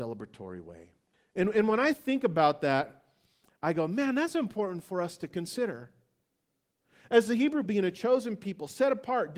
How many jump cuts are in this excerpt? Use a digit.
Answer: 2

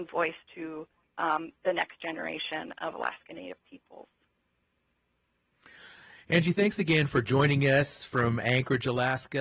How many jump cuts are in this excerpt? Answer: 0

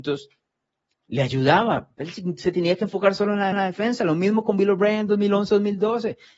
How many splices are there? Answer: 1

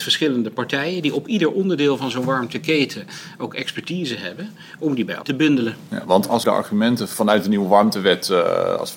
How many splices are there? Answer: 1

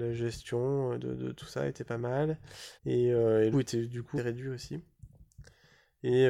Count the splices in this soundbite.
3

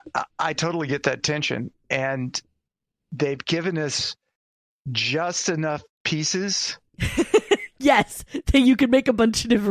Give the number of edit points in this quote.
0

